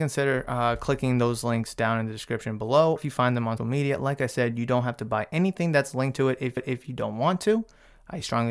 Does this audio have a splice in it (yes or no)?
yes